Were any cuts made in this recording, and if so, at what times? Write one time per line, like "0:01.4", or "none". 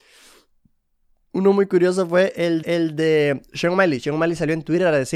0:02.6